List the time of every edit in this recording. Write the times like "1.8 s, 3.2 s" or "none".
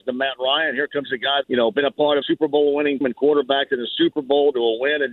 1.4 s, 2.2 s, 3.0 s